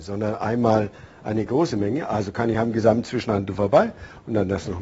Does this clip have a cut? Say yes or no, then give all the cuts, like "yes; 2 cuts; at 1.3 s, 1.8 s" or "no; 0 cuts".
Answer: no; 0 cuts